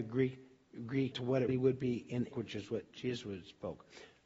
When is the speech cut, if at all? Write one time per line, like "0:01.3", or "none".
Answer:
0:01.1
0:01.5
0:02.3
0:02.9